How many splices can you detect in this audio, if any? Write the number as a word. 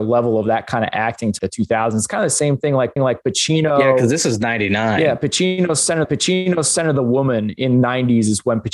three